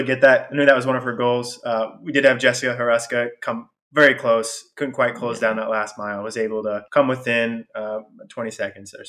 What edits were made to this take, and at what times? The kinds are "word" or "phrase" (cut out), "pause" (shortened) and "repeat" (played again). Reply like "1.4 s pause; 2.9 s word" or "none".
6.9 s pause